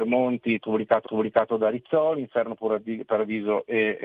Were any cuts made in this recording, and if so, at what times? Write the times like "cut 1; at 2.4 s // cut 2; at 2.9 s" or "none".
cut 1; at 1.0 s

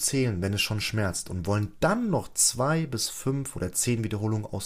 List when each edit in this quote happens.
none

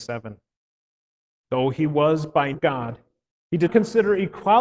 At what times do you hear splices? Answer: cut 1; at 2.5 s // cut 2; at 3.7 s

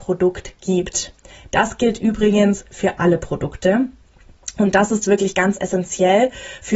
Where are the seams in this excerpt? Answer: none

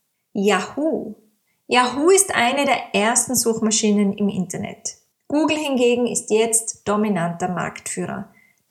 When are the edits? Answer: none

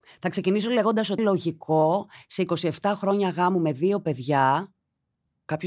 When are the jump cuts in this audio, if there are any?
cut 1; at 1.2 s

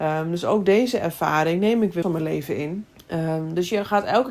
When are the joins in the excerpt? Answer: cut 1; at 2.0 s // cut 2; at 2.9 s

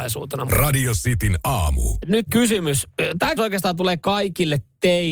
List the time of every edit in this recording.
cut 1; at 2.3 s // cut 2; at 3.4 s

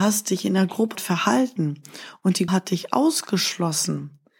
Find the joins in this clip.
cut 1; at 1.0 s // cut 2; at 2.5 s

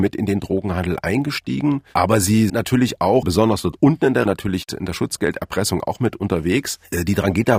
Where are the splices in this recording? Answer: cut 1; at 2.5 s // cut 2; at 3.2 s // cut 3; at 4.3 s

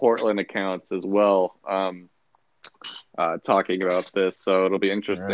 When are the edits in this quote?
none

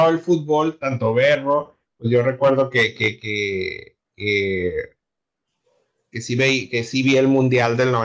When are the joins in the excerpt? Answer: cut 1; at 4.1 s

